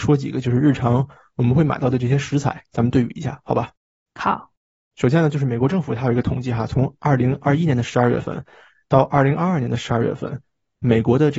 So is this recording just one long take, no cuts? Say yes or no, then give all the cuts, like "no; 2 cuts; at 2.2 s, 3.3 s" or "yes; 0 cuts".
yes; 0 cuts